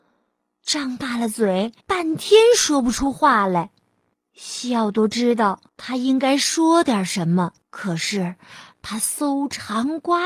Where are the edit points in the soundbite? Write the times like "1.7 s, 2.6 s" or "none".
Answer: 1.8 s, 4.1 s, 5.7 s, 7.6 s